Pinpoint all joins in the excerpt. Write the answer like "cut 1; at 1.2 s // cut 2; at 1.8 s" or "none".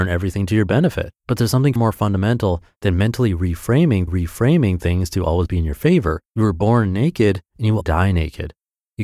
cut 1; at 1.2 s // cut 2; at 1.8 s // cut 3; at 4.1 s // cut 4; at 6.3 s // cut 5; at 7.5 s // cut 6; at 7.8 s

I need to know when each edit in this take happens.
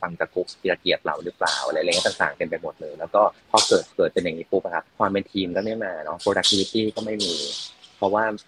cut 1; at 3.4 s // cut 2; at 3.9 s // cut 3; at 4.9 s

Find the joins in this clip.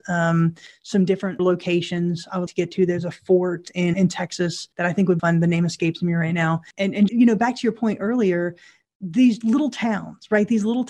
cut 1; at 1.4 s // cut 2; at 2.5 s // cut 3; at 3.9 s // cut 4; at 4.7 s // cut 5; at 5.2 s // cut 6; at 7.1 s // cut 7; at 9.4 s

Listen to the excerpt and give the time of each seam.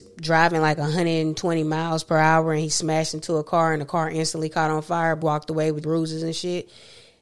cut 1; at 5.2 s // cut 2; at 5.8 s

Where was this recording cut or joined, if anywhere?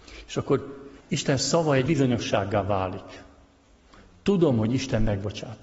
cut 1; at 1.0 s // cut 2; at 1.9 s

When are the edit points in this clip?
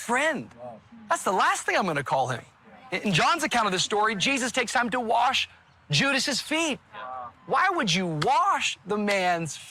none

